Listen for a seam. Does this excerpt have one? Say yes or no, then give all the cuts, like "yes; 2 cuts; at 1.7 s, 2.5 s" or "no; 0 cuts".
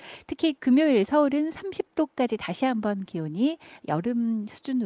no; 0 cuts